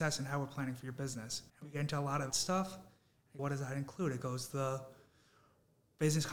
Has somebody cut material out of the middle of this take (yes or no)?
yes